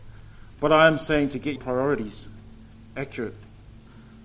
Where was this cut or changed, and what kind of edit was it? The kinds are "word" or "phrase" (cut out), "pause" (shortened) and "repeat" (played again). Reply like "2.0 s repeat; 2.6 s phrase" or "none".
1.6 s word